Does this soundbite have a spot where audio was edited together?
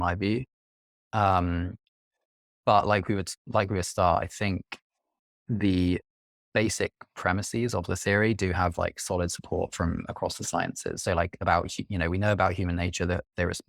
yes; 1 cut; at 3.8 s

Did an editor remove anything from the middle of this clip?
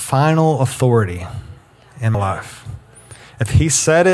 yes; 1 cut; at 2.1 s

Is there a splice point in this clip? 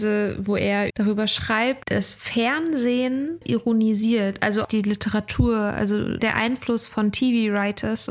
yes; 5 cuts; at 0.9 s, 1.8 s, 3.4 s, 4.6 s, 6.2 s

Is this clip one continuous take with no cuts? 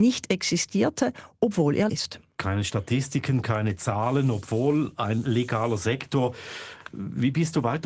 no; 1 cut; at 1.9 s

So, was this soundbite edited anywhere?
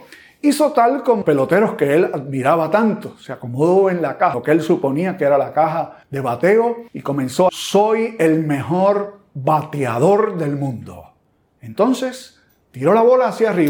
yes; 6 cuts; at 1.2 s, 4.3 s, 6.0 s, 6.9 s, 7.5 s, 11.2 s

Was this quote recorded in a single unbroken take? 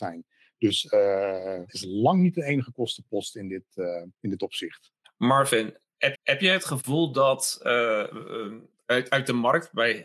no; 5 cuts; at 1.7 s, 4.1 s, 5.0 s, 6.1 s, 8.7 s

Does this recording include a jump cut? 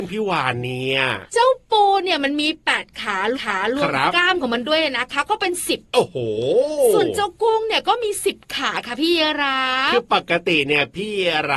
yes; 2 cuts; at 1.3 s, 3.3 s

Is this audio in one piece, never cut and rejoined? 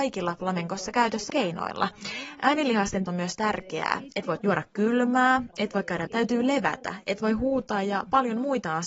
no; 4 cuts; at 1.3 s, 3.1 s, 4.4 s, 6.1 s

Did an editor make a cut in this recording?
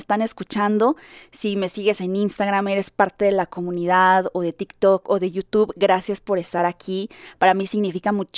no; 0 cuts

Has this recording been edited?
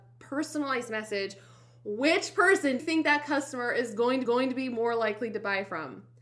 yes; 2 cuts; at 2.8 s, 4.3 s

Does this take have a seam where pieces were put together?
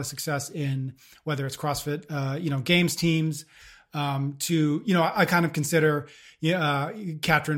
no; 0 cuts

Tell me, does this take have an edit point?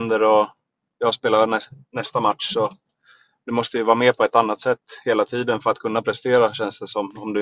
no; 0 cuts

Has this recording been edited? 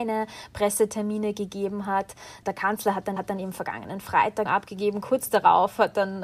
yes; 2 cuts; at 3.2 s, 4.5 s

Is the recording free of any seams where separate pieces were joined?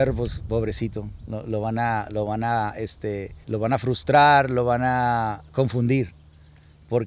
no; 1 cut; at 3.4 s

